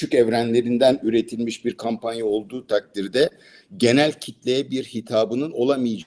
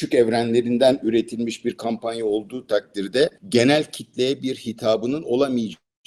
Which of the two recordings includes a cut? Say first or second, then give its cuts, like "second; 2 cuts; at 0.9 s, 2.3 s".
second; 1 cut; at 3.4 s